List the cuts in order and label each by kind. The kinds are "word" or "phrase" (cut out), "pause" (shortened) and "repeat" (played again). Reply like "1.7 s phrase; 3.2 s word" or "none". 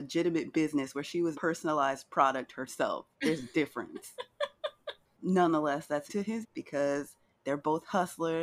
1.3 s word; 3.1 s pause; 5.1 s word; 6.1 s word; 6.4 s word